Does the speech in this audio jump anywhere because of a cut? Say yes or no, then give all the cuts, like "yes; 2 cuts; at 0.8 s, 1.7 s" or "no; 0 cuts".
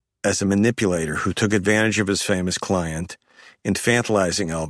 no; 0 cuts